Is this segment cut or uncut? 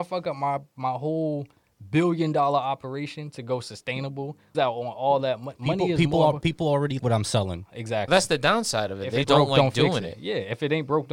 cut